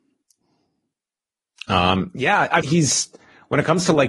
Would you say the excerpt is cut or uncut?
cut